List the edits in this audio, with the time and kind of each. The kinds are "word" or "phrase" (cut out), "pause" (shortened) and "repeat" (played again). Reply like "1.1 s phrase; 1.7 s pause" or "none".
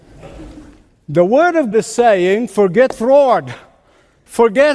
1.7 s word